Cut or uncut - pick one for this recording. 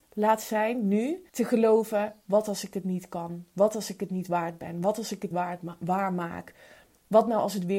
cut